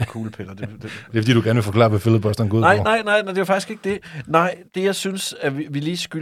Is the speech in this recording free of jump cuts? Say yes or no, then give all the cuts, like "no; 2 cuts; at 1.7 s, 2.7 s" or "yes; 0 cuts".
no; 1 cut; at 4.7 s